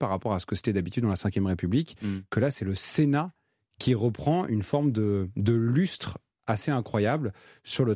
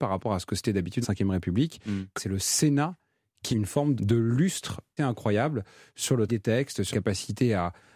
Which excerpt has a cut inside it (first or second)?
second